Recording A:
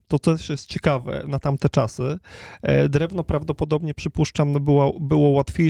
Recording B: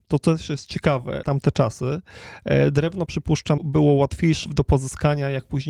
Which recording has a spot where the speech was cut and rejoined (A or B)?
B